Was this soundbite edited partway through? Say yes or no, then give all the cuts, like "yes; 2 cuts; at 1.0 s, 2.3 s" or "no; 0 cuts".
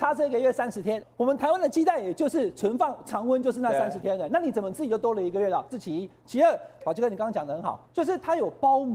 yes; 3 cuts; at 1.0 s, 6.8 s, 7.9 s